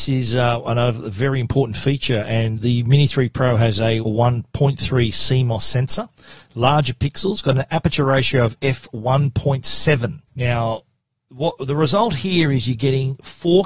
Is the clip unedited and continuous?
no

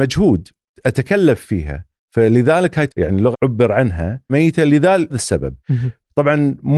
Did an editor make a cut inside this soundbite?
yes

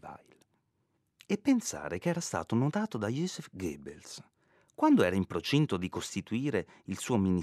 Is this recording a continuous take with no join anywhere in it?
yes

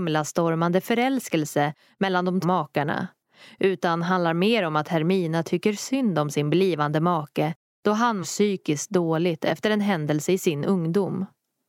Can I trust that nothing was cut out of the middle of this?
no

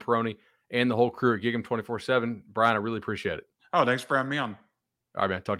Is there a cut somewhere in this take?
yes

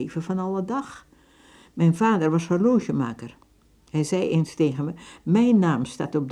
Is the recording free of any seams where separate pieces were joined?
yes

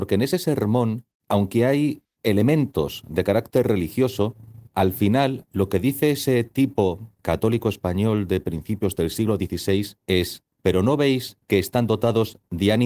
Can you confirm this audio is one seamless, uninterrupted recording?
no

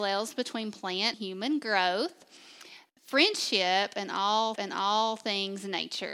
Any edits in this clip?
yes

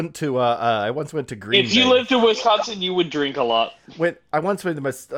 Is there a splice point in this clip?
yes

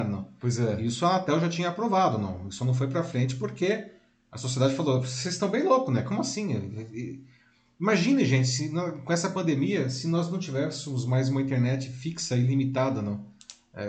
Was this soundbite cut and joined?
no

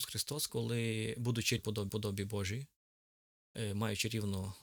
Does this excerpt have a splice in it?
yes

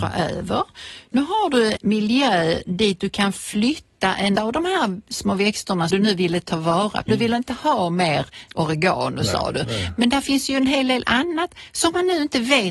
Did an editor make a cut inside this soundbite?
yes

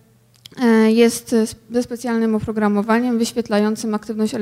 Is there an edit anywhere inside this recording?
no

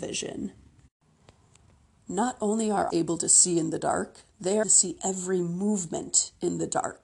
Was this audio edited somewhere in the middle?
yes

